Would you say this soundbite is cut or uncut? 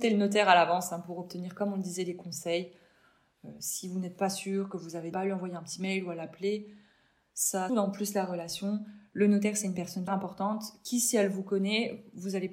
cut